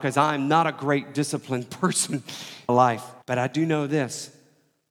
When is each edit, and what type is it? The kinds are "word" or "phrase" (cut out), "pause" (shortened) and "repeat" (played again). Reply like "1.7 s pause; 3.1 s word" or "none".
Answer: 2.7 s phrase; 3.2 s pause